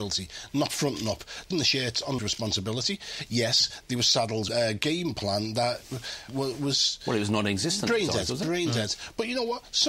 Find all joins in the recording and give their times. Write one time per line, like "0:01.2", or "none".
0:01.5
0:02.2
0:04.5
0:06.3